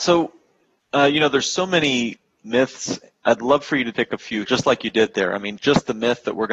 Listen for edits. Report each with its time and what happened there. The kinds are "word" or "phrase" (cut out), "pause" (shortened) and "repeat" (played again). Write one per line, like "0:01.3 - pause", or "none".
0:03.9 - word
0:04.4 - word
0:05.6 - word